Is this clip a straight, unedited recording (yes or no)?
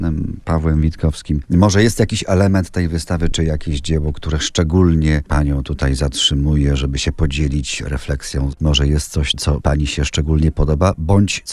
yes